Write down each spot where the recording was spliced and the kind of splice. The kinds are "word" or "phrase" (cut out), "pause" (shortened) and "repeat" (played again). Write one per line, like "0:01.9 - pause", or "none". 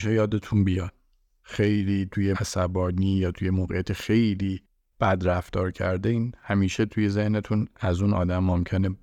0:02.3 - word